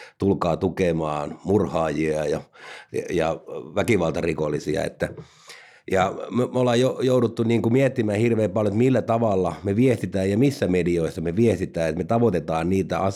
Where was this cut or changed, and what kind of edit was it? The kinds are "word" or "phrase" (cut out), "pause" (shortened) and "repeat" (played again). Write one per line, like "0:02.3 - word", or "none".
none

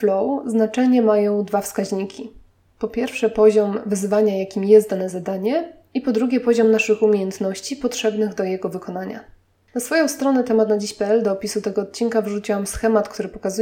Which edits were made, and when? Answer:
none

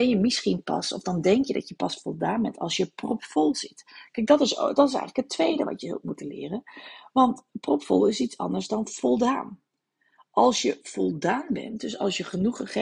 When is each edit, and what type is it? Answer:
0:07.5 - word

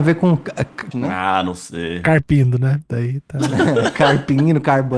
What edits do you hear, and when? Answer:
0:00.9 - word

